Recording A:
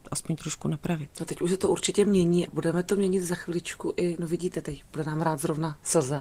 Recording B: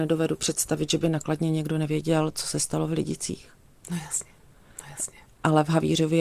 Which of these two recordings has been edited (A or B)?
A